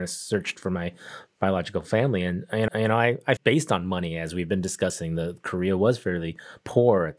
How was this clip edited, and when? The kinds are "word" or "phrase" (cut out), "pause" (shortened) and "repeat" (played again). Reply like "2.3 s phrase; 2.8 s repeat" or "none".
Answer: 2.7 s repeat; 3.4 s phrase